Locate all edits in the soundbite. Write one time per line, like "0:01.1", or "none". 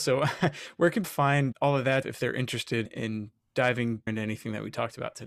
0:01.0
0:01.5
0:02.0
0:02.9
0:04.1